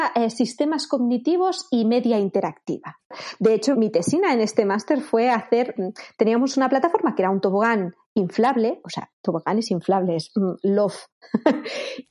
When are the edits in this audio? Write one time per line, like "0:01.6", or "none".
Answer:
0:03.7
0:05.8